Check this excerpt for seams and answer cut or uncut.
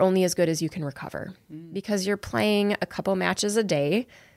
uncut